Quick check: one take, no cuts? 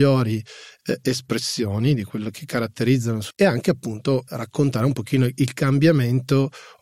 no; 2 cuts; at 3.3 s, 4.3 s

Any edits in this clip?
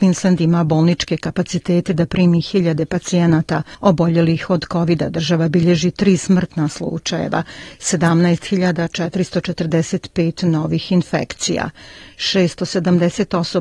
no; 0 cuts

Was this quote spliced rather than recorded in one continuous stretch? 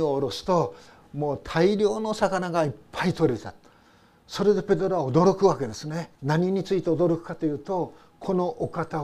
yes; 1 cut; at 6.1 s

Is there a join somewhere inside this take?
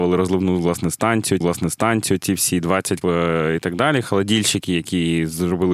yes; 2 cuts; at 1.4 s, 3.0 s

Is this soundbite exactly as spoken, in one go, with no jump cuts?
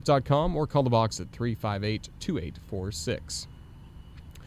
no; 1 cut; at 1.2 s

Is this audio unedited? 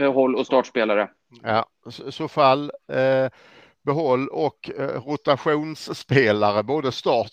yes; 0 cuts

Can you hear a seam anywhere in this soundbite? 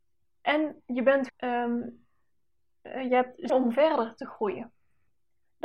yes; 2 cuts; at 1.3 s, 3.5 s

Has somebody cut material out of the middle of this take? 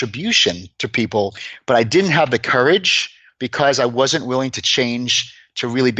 no; 0 cuts

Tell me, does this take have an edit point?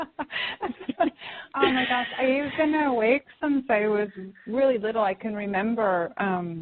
no; 0 cuts

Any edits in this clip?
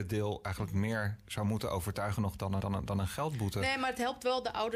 yes; 1 cut; at 2.6 s

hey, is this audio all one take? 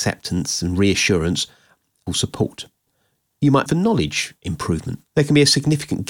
no; 2 cuts; at 2.1 s, 3.7 s

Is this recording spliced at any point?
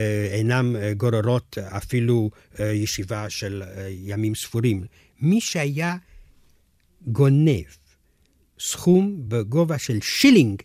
no; 0 cuts

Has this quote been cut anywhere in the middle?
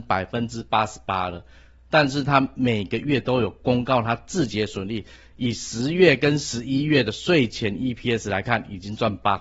no; 0 cuts

